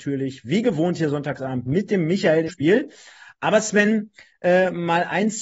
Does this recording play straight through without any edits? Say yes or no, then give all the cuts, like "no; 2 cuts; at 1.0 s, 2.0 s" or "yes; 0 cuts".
no; 1 cut; at 2.5 s